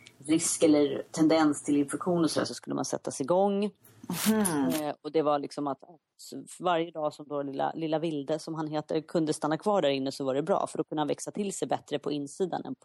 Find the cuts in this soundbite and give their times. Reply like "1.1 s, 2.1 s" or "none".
none